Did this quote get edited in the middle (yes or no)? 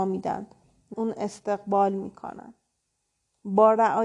yes